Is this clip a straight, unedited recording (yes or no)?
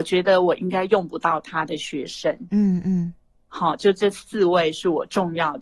yes